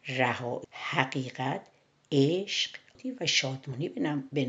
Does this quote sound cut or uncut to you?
uncut